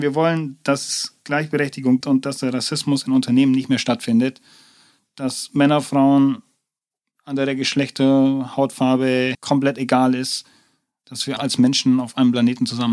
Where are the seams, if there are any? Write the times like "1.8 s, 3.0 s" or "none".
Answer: 2.0 s, 9.3 s, 11.4 s

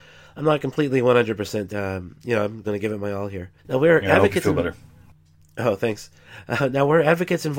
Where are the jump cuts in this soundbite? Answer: 1.7 s, 2.6 s, 3.6 s

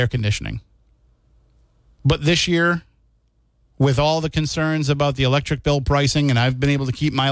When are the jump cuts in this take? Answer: none

